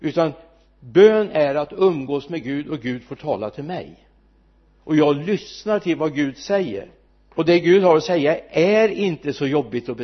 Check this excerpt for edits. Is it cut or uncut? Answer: cut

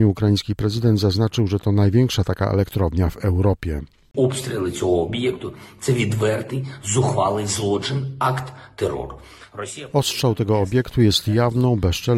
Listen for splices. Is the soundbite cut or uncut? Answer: uncut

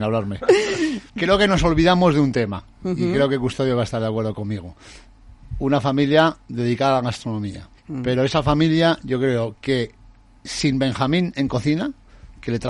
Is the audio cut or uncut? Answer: cut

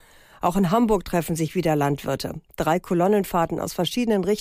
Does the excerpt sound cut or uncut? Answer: uncut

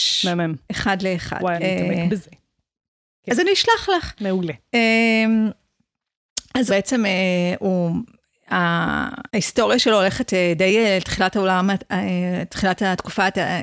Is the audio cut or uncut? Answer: cut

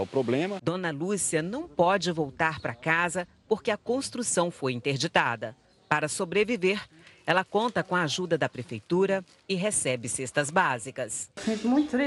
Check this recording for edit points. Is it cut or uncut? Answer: uncut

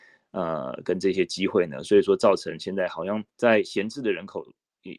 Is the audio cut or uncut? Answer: cut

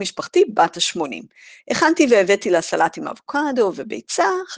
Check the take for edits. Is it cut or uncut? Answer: uncut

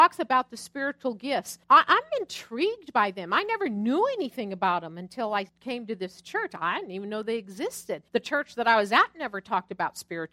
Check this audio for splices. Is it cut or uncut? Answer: cut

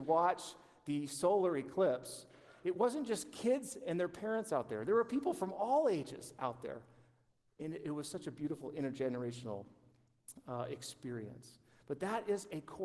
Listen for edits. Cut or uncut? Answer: uncut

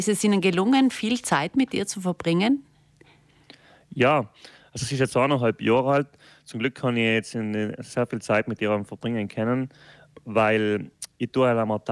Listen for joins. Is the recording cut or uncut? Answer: uncut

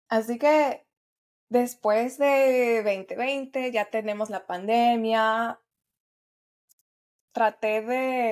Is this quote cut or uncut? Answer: uncut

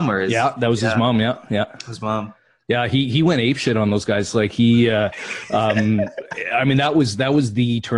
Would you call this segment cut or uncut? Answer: uncut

